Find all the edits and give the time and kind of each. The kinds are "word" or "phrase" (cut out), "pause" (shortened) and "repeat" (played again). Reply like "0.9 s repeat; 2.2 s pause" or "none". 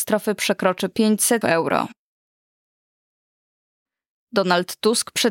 1.4 s word